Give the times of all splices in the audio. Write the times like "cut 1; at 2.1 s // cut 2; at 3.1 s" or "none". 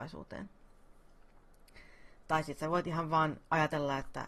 none